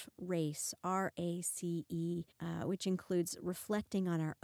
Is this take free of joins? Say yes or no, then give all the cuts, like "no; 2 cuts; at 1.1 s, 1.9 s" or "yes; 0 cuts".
no; 1 cut; at 2.3 s